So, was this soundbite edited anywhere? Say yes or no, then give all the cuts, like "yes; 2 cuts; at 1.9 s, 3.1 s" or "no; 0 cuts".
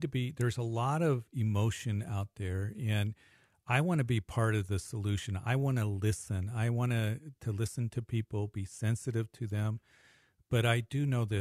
no; 0 cuts